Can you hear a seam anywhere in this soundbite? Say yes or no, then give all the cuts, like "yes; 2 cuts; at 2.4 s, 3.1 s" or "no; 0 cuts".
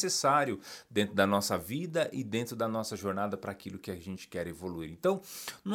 no; 0 cuts